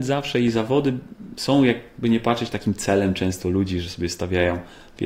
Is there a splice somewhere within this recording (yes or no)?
no